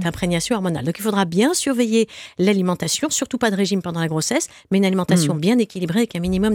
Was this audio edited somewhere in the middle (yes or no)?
no